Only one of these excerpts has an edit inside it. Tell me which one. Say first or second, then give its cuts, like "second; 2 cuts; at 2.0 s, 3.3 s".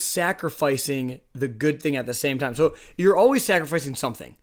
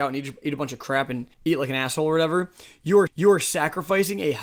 second; 2 cuts; at 1.3 s, 3.1 s